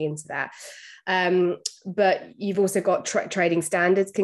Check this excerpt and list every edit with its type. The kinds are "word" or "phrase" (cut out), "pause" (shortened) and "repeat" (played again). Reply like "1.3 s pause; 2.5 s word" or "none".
none